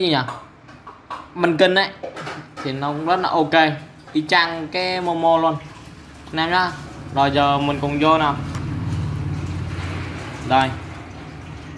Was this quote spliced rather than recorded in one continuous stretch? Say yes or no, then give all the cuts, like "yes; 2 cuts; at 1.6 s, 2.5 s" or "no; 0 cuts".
no; 0 cuts